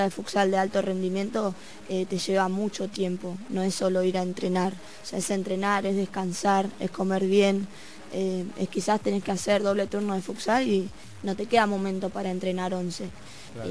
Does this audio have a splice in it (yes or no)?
no